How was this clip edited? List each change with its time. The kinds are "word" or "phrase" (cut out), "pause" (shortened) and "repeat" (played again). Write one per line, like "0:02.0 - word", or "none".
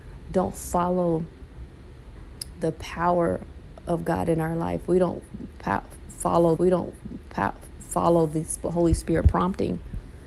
0:06.6 - repeat